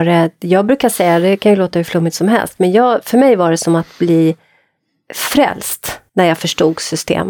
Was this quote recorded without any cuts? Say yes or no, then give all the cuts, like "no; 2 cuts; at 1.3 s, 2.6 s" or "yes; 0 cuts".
no; 1 cut; at 6.1 s